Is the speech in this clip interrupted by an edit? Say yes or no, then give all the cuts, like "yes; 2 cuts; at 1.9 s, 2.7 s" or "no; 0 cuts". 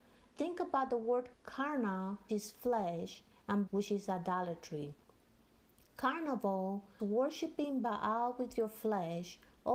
yes; 4 cuts; at 1.3 s, 2.3 s, 3.7 s, 7.0 s